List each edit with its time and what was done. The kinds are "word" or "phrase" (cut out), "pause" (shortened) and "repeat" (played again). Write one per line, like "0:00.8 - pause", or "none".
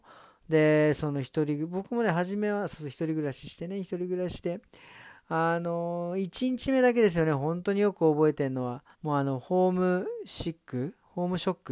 0:08.9 - pause